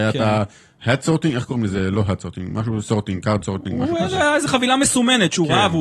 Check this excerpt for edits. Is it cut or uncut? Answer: uncut